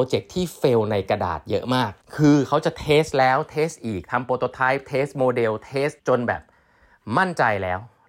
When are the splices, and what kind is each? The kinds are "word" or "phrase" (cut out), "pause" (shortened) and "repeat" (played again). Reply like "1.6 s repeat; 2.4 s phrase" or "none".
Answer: 2.0 s pause; 6.0 s pause